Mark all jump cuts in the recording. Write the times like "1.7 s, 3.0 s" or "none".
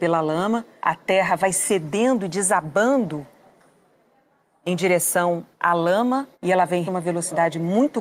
5.5 s, 6.3 s, 6.9 s